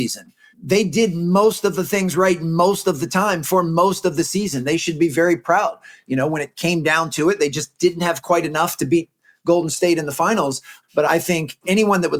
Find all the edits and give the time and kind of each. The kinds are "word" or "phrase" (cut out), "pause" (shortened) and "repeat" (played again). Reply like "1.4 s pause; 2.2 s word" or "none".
none